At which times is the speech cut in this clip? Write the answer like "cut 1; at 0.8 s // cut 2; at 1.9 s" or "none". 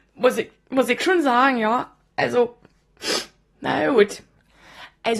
none